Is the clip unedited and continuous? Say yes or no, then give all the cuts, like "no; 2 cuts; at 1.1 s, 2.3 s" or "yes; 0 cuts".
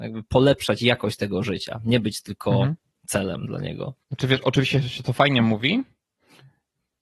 no; 2 cuts; at 2.9 s, 4.0 s